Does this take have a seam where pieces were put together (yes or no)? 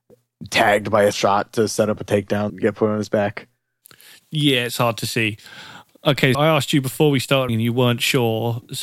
yes